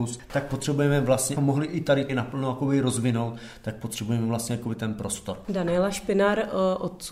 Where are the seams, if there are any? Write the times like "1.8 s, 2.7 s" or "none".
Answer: 1.4 s, 2.1 s